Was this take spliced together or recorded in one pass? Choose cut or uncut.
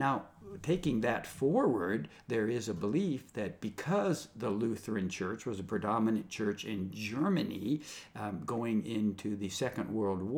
uncut